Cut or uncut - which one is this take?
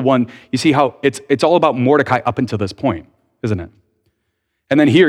uncut